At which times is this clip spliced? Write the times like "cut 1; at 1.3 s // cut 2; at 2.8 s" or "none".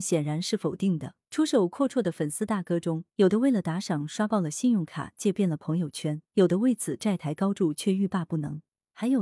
cut 1; at 1.2 s // cut 2; at 3.1 s // cut 3; at 6.2 s